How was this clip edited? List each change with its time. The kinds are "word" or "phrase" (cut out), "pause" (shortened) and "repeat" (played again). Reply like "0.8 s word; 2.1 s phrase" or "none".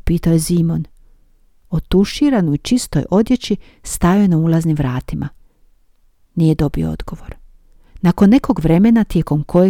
none